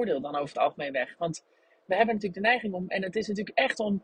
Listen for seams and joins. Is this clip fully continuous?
yes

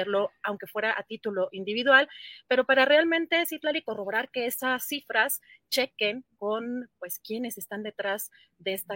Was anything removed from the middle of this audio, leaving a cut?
no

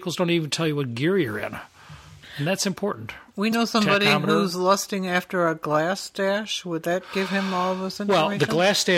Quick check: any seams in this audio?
no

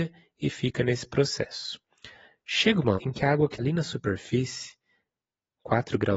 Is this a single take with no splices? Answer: no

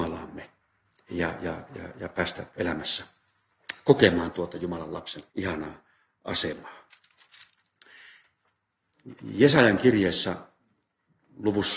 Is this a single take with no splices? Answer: no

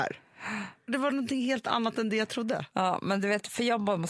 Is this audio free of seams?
yes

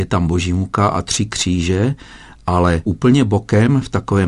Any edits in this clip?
no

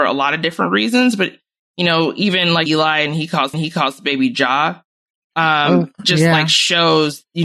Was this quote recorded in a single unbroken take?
no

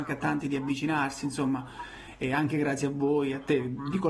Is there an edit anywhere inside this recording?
no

